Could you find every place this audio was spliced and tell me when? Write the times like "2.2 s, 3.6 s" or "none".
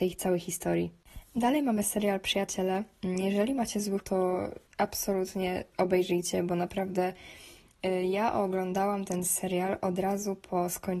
1.2 s, 4.0 s, 4.7 s